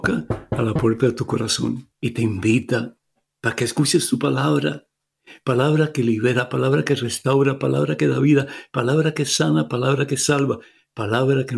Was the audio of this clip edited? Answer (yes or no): yes